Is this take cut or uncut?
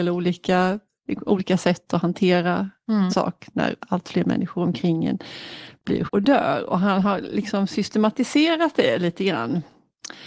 cut